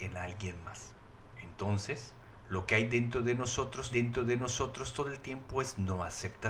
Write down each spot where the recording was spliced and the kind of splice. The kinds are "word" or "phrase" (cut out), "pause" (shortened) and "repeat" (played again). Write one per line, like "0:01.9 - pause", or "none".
0:03.9 - repeat